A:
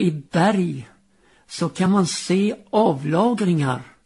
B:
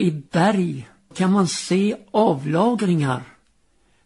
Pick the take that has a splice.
B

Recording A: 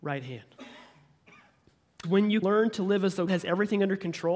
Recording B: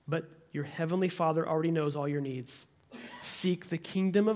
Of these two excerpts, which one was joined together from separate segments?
A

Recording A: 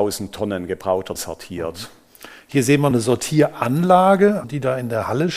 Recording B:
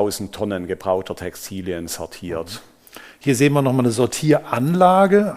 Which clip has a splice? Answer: A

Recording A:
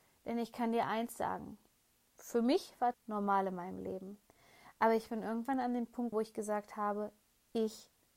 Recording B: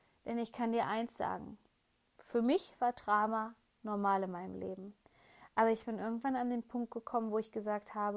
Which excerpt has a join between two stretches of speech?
A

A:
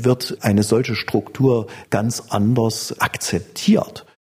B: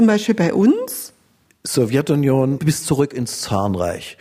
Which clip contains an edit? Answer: B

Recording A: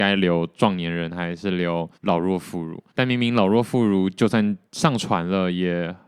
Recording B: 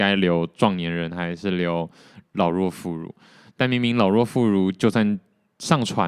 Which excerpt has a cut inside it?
A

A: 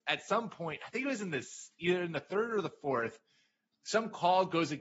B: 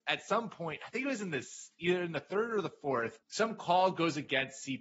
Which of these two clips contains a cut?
B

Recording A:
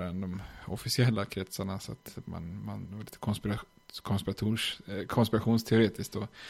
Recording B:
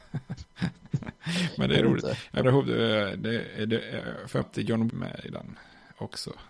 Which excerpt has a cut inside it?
B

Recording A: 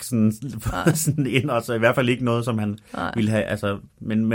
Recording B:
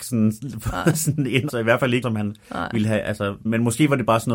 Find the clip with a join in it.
B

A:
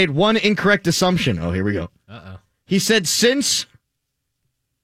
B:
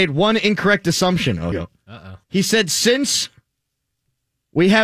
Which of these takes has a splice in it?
B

